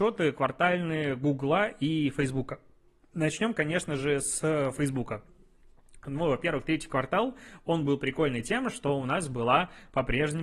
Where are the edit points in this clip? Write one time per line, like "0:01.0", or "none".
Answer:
none